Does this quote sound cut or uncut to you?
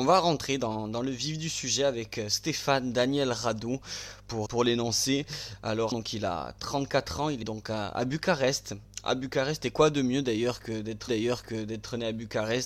cut